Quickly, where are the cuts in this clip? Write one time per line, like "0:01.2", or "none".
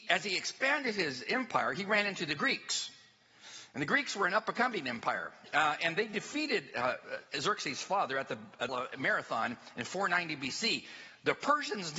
0:08.7

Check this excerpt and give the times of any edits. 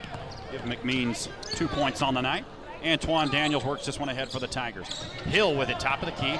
none

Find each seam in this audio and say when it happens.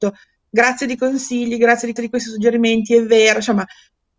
0:01.0
0:02.0

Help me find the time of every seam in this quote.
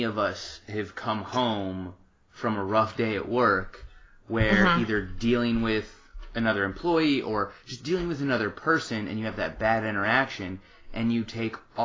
none

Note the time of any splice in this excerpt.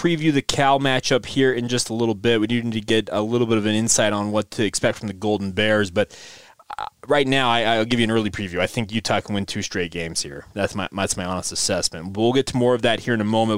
none

